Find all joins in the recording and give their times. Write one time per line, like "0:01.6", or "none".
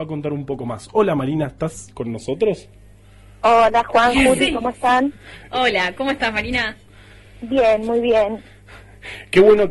none